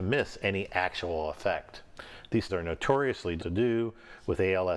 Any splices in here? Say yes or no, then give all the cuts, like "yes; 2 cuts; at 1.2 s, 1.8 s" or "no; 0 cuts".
yes; 2 cuts; at 2.5 s, 3.4 s